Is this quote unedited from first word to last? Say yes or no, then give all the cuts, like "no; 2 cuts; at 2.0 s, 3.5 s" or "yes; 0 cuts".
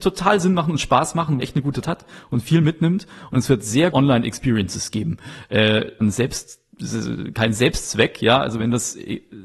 no; 4 cuts; at 1.4 s, 1.8 s, 3.9 s, 6.0 s